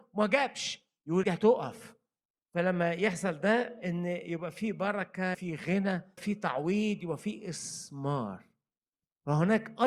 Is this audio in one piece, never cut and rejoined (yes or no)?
no